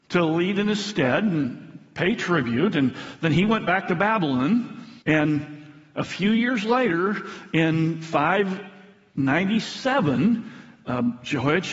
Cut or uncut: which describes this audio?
cut